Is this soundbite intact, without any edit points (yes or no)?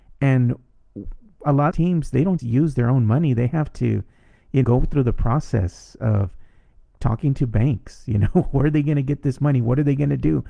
no